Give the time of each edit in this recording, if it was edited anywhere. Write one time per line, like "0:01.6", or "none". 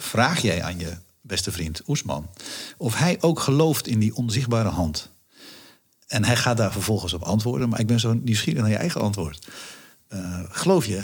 none